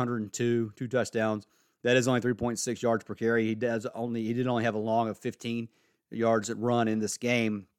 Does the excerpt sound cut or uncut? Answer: uncut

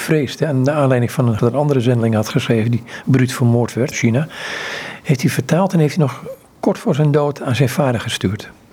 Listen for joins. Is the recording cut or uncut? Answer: cut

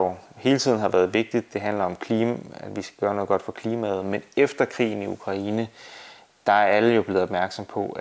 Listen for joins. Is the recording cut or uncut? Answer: uncut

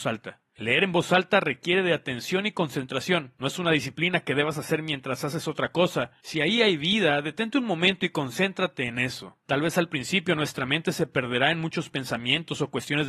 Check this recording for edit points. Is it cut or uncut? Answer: uncut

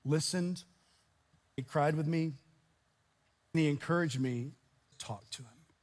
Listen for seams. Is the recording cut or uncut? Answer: cut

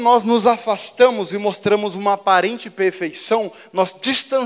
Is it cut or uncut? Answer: uncut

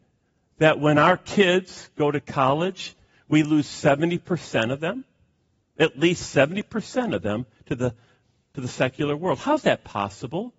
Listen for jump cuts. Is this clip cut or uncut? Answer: uncut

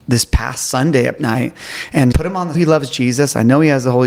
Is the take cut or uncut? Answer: cut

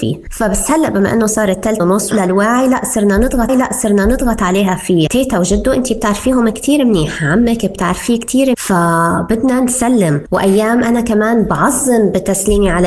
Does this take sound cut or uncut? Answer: cut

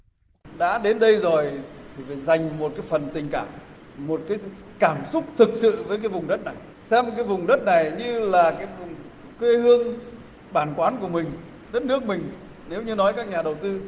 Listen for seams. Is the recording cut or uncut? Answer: cut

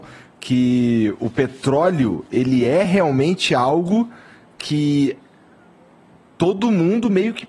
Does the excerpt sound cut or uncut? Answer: uncut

